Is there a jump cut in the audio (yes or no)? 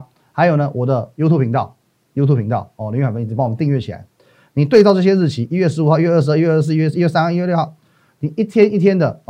no